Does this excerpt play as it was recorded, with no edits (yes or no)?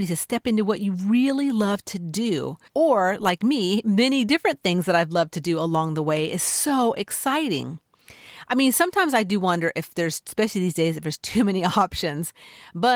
no